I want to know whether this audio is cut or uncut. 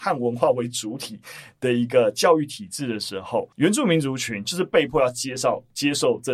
cut